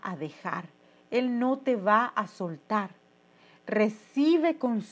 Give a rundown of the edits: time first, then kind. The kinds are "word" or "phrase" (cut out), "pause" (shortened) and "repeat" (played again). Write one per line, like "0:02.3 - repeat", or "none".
none